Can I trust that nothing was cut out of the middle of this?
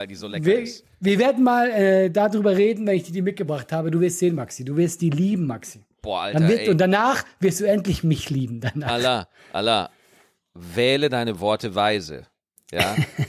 yes; 0 cuts

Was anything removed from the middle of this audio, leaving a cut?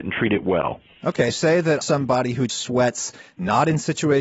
yes; 3 cuts; at 1.3 s, 1.8 s, 2.5 s

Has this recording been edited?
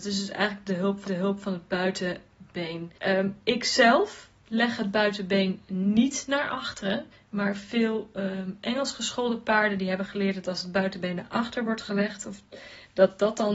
yes; 3 cuts; at 1.1 s, 3.0 s, 7.1 s

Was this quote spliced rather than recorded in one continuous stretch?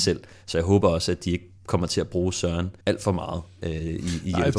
yes; 2 cuts; at 1.6 s, 2.8 s

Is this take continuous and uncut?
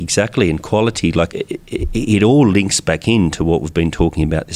no; 1 cut; at 1.3 s

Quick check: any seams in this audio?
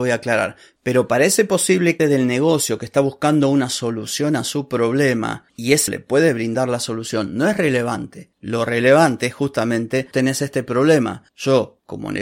yes; 3 cuts; at 2.0 s, 5.9 s, 10.1 s

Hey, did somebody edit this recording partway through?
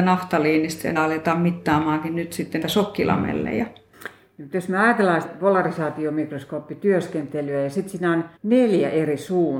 yes; 4 cuts; at 1.0 s, 2.6 s, 5.2 s, 8.4 s

